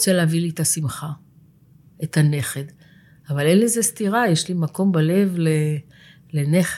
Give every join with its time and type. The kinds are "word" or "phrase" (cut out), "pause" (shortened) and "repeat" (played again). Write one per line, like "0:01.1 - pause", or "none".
none